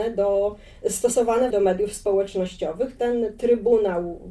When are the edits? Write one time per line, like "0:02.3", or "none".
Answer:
0:01.5